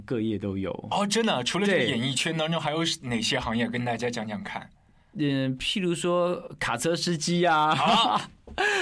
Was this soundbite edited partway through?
no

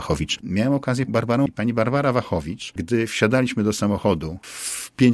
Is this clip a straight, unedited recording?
no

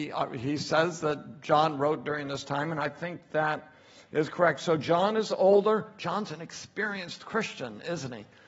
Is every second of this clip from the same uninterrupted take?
yes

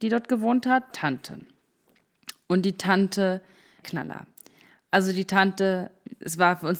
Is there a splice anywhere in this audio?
yes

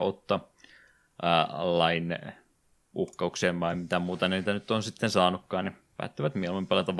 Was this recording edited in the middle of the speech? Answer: no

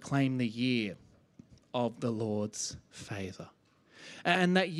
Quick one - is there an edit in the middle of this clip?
no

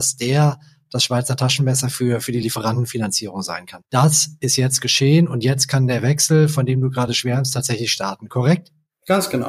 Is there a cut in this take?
no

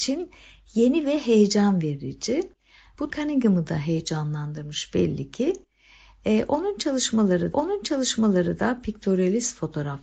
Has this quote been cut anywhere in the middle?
yes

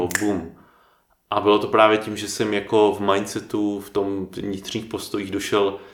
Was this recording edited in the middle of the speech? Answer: no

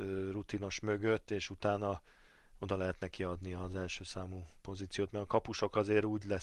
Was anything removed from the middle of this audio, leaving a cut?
no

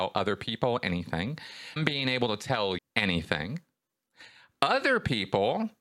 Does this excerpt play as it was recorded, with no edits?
no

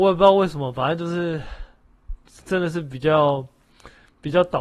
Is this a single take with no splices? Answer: yes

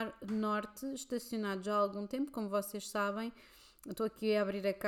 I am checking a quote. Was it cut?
no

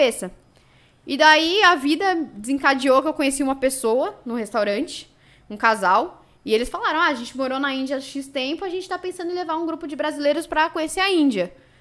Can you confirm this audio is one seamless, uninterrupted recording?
yes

